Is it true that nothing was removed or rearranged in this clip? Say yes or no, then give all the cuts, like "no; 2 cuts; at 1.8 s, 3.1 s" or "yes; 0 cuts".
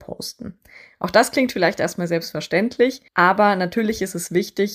no; 1 cut; at 3.1 s